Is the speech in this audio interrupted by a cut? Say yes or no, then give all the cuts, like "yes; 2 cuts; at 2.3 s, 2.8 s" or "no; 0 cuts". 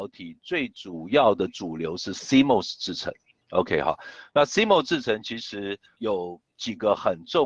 no; 0 cuts